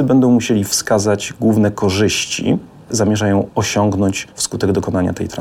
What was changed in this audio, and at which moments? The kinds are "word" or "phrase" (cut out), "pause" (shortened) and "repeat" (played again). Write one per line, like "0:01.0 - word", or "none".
0:02.9 - word